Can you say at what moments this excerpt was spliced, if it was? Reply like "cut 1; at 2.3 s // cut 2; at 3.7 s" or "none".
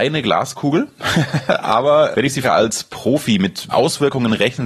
cut 1; at 2.1 s // cut 2; at 2.4 s // cut 3; at 3.7 s